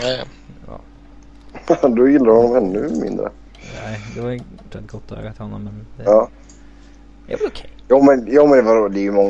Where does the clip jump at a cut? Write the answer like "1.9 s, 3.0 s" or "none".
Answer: 4.7 s